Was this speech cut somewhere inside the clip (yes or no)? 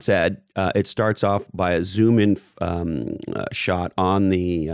no